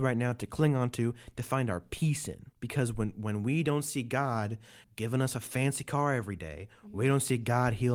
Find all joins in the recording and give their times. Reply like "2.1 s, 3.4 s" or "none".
2.5 s